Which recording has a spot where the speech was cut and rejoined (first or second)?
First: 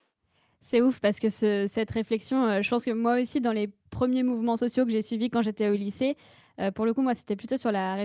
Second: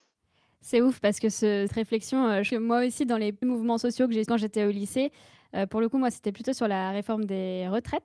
second